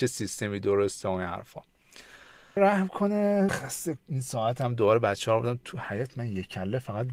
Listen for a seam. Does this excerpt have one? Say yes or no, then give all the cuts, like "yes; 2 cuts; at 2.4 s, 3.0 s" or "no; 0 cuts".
yes; 3 cuts; at 2.6 s, 3.5 s, 4.0 s